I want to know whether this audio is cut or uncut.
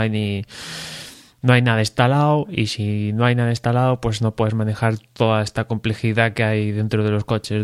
uncut